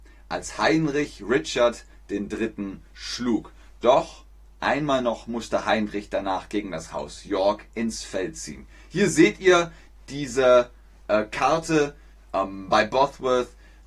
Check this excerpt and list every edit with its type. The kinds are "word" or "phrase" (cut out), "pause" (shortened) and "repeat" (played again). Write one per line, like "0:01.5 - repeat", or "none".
none